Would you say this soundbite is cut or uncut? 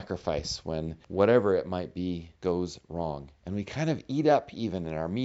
cut